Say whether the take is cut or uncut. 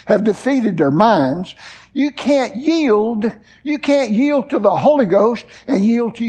uncut